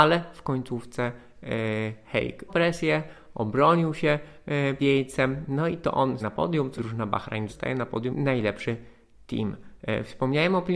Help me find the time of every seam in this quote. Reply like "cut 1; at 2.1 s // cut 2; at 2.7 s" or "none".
cut 1; at 2.5 s // cut 2; at 4.8 s // cut 3; at 6.2 s // cut 4; at 6.8 s // cut 5; at 7.5 s // cut 6; at 8.1 s